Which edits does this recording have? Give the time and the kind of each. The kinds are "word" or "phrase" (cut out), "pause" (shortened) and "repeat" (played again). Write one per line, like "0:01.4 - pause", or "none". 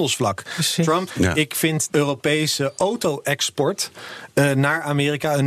0:01.1 - word
0:01.9 - word